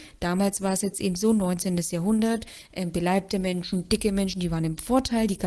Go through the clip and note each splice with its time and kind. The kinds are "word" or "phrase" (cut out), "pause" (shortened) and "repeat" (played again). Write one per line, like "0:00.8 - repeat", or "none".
none